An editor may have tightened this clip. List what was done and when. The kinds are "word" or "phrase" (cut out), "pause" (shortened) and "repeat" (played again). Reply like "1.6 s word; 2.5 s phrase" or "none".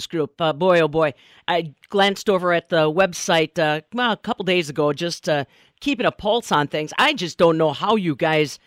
none